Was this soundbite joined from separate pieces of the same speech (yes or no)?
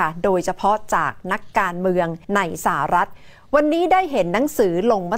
yes